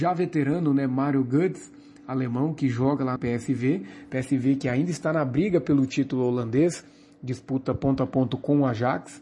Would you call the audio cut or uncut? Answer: cut